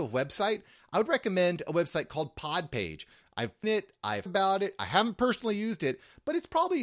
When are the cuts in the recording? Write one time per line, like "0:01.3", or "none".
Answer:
0:03.6
0:04.3